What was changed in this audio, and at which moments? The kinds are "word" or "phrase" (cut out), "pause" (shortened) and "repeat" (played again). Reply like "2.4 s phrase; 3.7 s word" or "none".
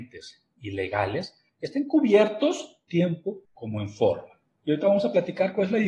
1.5 s pause; 2.9 s phrase; 3.4 s pause